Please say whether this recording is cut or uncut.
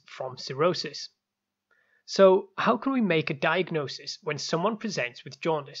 uncut